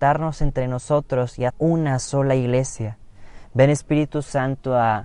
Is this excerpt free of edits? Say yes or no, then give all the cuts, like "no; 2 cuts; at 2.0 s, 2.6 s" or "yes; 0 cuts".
no; 1 cut; at 1.5 s